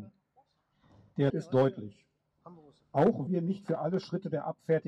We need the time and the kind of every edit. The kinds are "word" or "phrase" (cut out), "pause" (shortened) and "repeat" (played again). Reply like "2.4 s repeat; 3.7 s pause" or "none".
1.3 s word; 3.3 s word